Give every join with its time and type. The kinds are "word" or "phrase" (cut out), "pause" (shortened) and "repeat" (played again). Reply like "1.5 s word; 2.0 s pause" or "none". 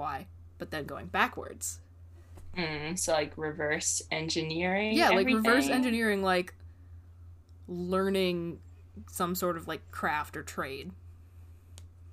none